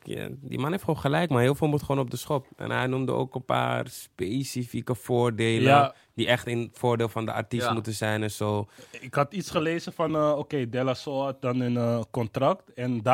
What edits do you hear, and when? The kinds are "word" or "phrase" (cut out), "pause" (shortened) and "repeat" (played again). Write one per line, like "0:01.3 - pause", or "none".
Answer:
none